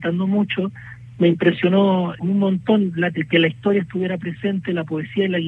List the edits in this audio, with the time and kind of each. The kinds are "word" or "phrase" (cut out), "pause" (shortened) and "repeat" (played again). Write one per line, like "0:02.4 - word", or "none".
0:02.2 - word
0:03.1 - word

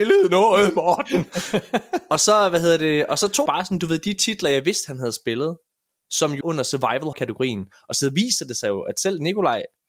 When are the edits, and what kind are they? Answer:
0:03.5 - word
0:06.4 - word
0:07.1 - word

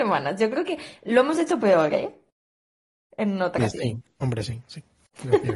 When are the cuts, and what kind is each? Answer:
0:03.6 - word

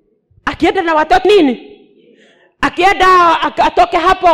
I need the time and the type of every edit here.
0:01.2 - word

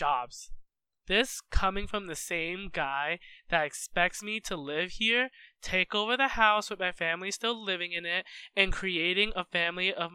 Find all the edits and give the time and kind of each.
none

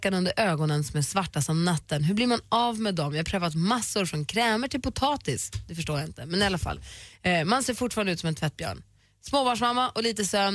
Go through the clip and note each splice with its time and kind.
none

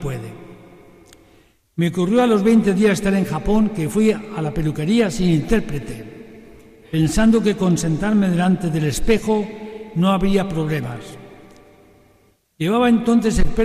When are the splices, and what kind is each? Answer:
none

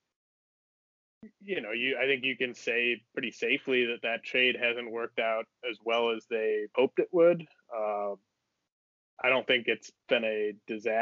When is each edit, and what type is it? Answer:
0:06.7 - word

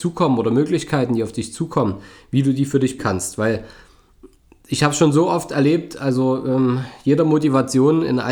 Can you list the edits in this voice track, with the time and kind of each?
0:03.0 - word

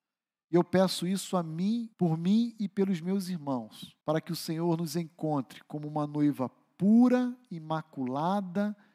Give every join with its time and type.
0:01.9 - pause
0:04.0 - pause

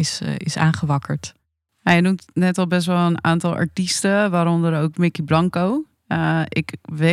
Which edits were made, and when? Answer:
none

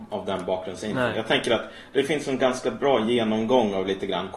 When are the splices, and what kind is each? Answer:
none

